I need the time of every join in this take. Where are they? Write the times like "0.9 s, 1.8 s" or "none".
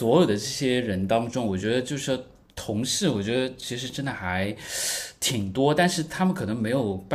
none